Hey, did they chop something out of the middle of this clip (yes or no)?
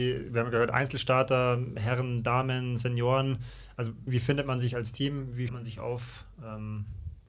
yes